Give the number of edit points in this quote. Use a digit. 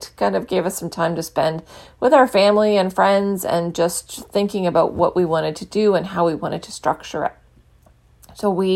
0